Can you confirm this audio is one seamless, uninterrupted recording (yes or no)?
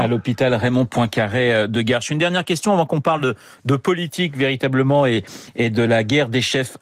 yes